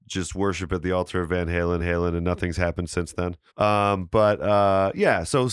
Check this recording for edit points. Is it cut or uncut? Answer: cut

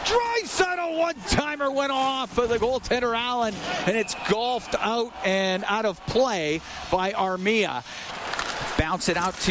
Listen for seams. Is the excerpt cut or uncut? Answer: uncut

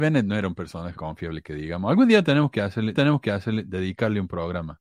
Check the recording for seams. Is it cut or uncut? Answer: cut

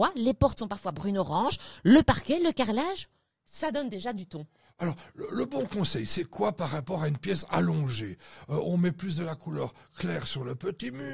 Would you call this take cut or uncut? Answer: uncut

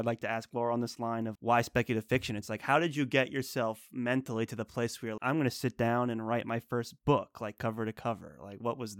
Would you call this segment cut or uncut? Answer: cut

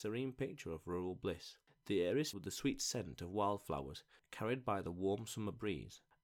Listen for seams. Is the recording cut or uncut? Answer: cut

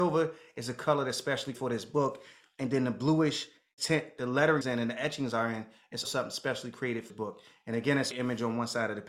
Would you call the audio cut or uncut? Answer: cut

